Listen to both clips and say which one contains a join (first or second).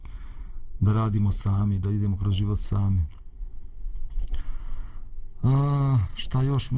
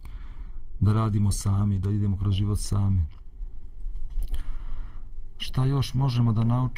second